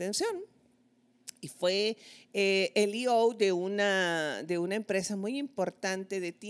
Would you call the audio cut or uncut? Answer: uncut